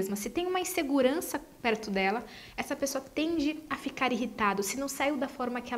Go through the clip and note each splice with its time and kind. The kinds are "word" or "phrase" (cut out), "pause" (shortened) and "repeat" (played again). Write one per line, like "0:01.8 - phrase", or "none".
none